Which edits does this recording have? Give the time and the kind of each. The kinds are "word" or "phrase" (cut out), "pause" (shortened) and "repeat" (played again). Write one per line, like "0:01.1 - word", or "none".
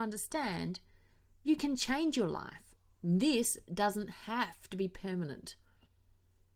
none